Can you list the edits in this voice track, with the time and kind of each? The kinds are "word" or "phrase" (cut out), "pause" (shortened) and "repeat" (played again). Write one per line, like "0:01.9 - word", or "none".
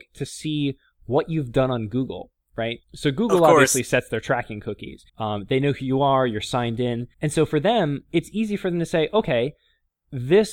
0:02.8 - pause
0:05.1 - pause
0:07.1 - pause